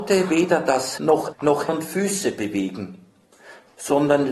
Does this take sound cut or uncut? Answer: cut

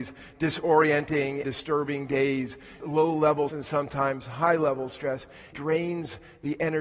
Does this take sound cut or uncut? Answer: cut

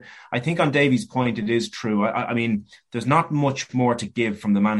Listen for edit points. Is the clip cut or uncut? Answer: uncut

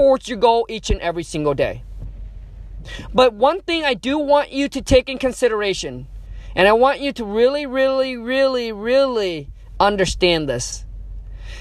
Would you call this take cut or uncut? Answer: uncut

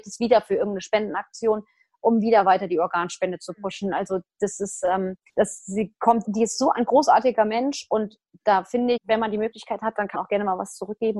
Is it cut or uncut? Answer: cut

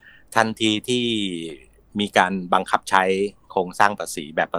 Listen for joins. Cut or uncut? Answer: uncut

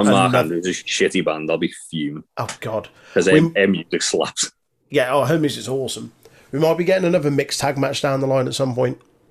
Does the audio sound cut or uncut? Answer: uncut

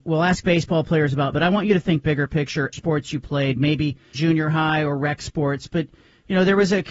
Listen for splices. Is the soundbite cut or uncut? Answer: cut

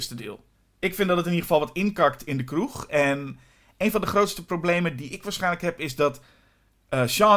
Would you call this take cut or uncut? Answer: uncut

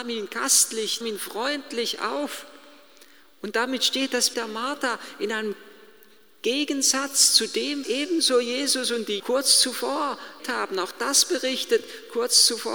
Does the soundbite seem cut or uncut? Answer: cut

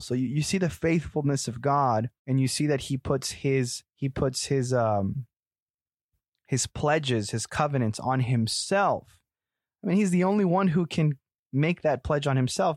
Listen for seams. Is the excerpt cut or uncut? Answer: cut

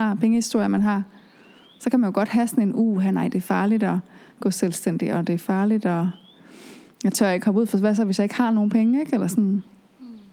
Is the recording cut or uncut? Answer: uncut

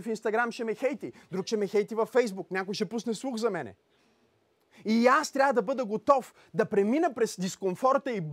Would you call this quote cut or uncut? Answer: uncut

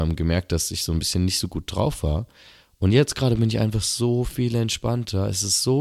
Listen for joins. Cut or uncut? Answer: uncut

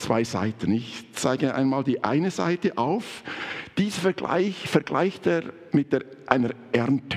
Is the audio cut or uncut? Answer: uncut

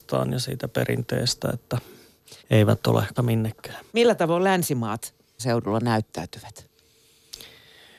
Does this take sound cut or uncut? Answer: cut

